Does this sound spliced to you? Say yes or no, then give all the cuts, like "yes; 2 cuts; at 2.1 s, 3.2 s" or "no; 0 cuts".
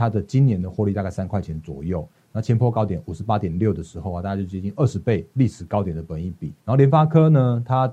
yes; 1 cut; at 6.6 s